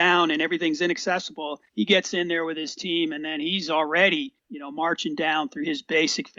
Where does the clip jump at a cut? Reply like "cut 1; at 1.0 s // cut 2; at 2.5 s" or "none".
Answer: cut 1; at 1.7 s // cut 2; at 4.4 s